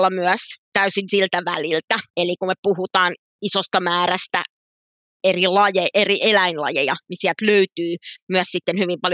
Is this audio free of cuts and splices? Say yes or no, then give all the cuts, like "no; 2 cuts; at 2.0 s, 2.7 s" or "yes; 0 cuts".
no; 2 cuts; at 1.1 s, 2.1 s